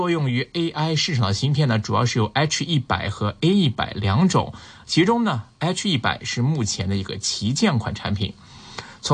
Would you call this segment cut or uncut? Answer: uncut